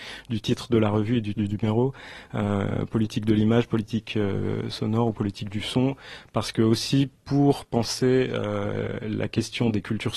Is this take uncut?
no; 1 cut; at 1.3 s

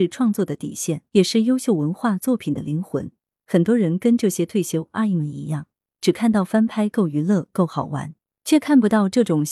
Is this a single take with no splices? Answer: no; 1 cut; at 1.1 s

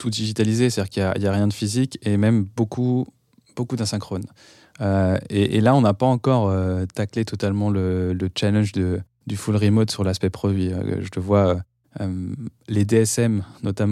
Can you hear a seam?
no; 0 cuts

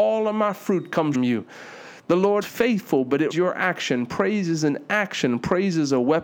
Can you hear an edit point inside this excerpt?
yes; 3 cuts; at 1.1 s, 2.4 s, 3.3 s

